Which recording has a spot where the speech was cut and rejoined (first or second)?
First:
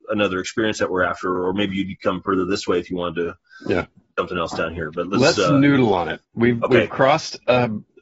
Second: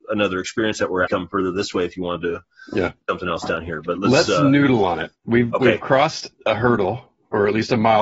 second